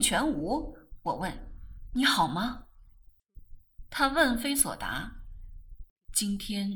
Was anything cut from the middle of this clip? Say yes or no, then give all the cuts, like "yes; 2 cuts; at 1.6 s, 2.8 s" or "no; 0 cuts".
no; 0 cuts